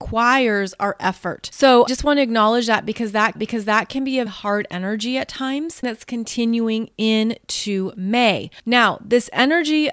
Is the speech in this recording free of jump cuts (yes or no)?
no